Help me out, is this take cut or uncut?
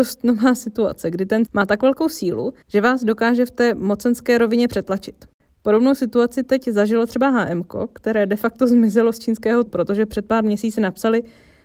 cut